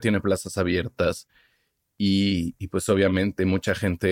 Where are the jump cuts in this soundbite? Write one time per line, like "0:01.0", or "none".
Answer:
none